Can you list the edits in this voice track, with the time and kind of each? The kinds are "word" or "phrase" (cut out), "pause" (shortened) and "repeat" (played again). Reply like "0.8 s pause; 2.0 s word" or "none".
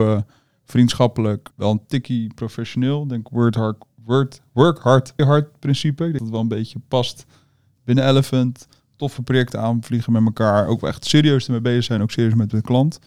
1.5 s pause; 5.2 s word; 6.2 s word